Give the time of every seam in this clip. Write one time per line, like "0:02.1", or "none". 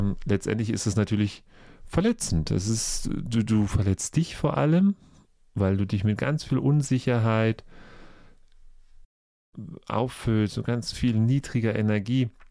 none